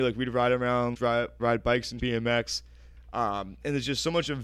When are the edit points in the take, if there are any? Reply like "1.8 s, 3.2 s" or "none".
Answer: 0.9 s, 1.4 s, 2.0 s